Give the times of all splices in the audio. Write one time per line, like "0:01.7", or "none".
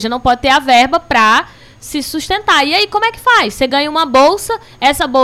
none

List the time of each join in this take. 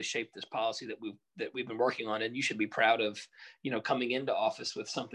none

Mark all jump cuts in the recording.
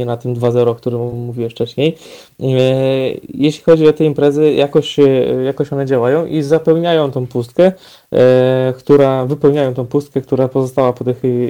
none

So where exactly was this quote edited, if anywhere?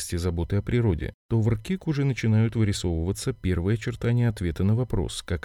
none

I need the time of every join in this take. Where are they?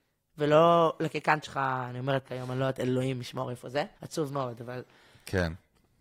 0:01.4
0:02.2
0:03.9

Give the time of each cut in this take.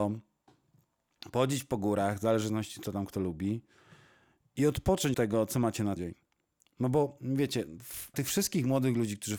0:05.1
0:06.0
0:08.1

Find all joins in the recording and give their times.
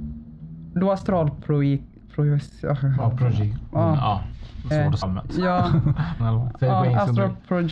0:04.7
0:05.0
0:06.2

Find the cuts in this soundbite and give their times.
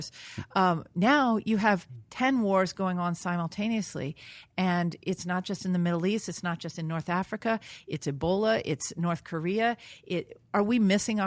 none

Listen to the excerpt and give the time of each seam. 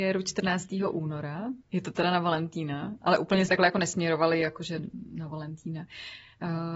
0:01.6
0:03.5

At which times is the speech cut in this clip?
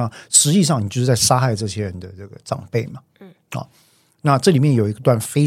none

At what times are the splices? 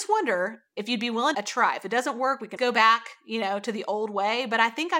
0:01.3
0:02.6

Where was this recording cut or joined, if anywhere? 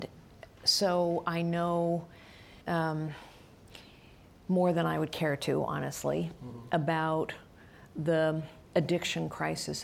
0:02.6
0:08.7

